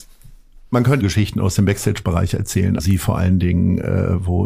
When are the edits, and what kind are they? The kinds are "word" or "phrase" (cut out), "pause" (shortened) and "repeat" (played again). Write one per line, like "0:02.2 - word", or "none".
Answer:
0:01.0 - phrase
0:02.8 - word